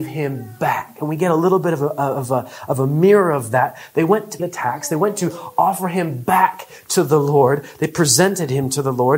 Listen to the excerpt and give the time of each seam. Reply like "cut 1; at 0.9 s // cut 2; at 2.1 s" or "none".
cut 1; at 4.4 s